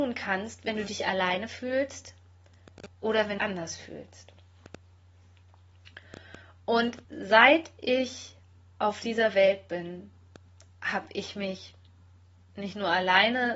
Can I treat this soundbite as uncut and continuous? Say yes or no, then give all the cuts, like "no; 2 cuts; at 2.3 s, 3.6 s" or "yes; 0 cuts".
no; 3 cuts; at 2.9 s, 3.4 s, 7.0 s